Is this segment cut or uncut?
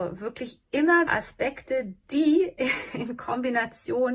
cut